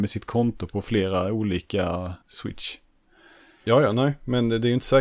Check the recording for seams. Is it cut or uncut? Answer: cut